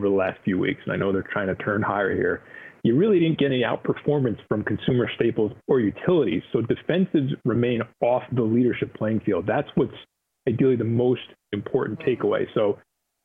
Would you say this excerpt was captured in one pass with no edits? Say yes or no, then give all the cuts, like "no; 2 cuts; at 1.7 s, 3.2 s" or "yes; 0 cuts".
yes; 0 cuts